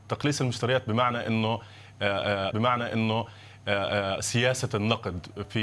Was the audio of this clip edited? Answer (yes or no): yes